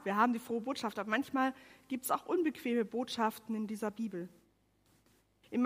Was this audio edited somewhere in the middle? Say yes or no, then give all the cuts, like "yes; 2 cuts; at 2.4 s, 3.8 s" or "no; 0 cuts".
no; 0 cuts